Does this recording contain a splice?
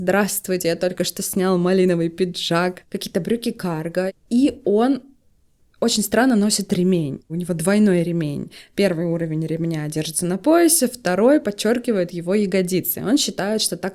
no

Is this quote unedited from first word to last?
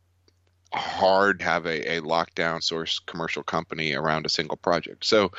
no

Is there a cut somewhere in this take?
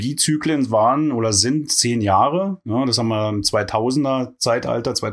no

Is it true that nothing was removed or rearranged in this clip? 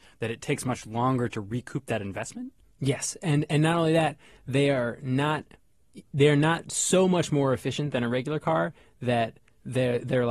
yes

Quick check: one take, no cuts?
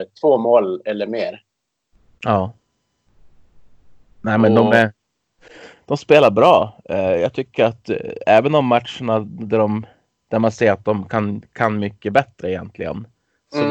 yes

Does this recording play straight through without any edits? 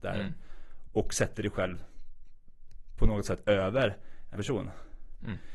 no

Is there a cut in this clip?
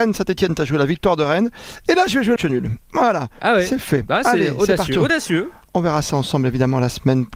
yes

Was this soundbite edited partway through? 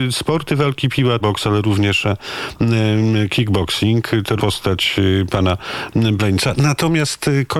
yes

